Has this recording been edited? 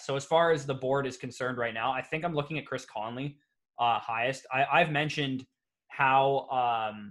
no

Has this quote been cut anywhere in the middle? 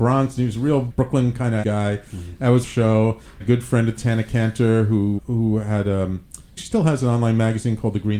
yes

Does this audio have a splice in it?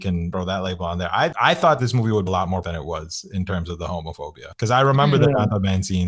yes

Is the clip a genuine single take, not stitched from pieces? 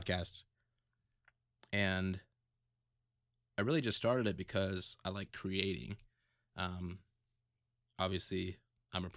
yes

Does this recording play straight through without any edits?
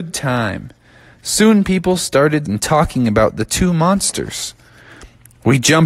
no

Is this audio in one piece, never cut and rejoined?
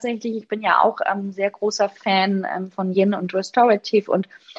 yes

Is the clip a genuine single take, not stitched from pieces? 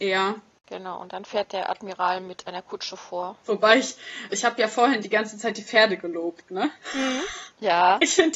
no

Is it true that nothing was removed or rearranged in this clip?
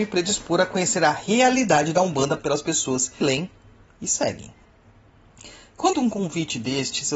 no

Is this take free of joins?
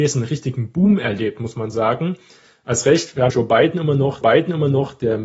no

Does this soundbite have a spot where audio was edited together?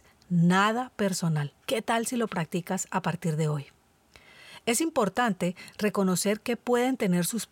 yes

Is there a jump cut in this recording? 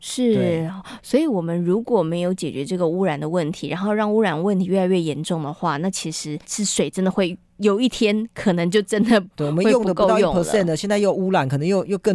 yes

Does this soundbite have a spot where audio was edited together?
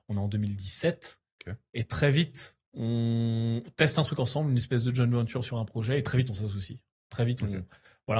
no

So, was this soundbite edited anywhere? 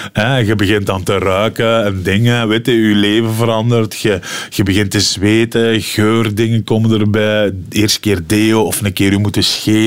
no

